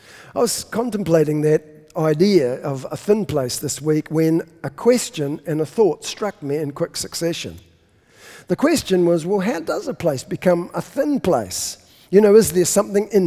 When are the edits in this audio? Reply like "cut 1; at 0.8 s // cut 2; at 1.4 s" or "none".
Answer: none